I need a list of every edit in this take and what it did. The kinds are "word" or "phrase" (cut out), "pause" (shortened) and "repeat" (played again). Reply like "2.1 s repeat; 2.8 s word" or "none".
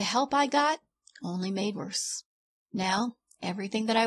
1.7 s word